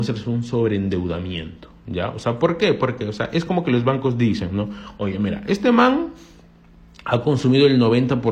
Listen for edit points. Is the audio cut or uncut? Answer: uncut